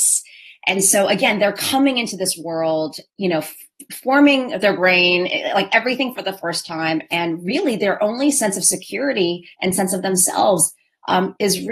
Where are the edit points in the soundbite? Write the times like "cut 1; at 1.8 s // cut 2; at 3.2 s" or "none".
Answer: cut 1; at 3.1 s // cut 2; at 9.5 s